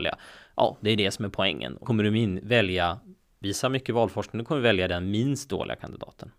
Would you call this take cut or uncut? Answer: cut